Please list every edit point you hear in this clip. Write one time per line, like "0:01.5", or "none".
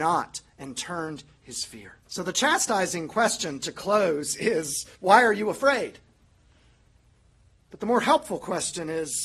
0:01.4
0:02.0
0:04.9

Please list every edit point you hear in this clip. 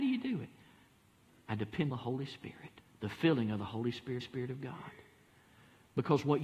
0:01.9
0:02.8
0:04.2

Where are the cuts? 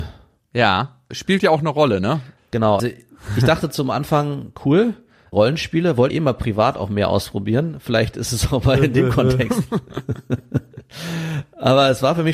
0:02.8
0:06.1

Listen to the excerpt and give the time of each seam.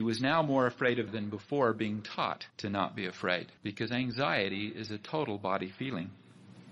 0:01.1
0:02.5
0:03.6

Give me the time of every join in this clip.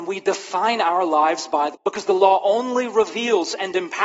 0:01.7

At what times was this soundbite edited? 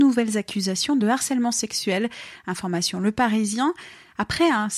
none

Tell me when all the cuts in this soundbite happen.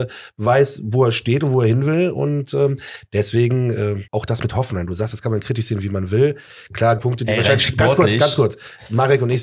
0:04.1
0:07.0

